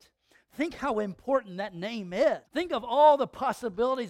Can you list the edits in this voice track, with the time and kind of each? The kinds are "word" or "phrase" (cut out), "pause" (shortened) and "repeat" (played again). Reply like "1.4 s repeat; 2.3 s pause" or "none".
2.5 s pause